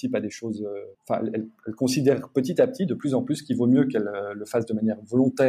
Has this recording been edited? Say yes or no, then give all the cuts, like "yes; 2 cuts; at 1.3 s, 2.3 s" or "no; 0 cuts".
yes; 1 cut; at 0.9 s